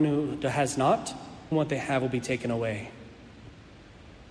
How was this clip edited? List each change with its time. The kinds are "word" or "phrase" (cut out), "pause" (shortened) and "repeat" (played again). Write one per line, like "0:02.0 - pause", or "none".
0:01.5 - word